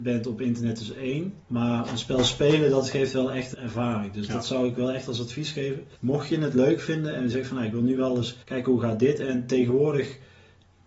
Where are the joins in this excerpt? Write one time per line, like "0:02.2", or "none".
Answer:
0:01.4
0:03.5
0:06.0
0:08.4